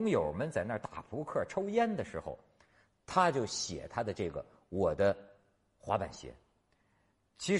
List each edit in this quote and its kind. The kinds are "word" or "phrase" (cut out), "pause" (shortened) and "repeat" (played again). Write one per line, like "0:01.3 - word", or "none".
none